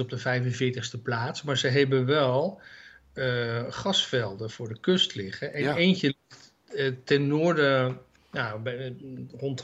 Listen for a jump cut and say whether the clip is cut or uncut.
uncut